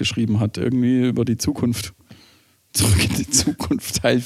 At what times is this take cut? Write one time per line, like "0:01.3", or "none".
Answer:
none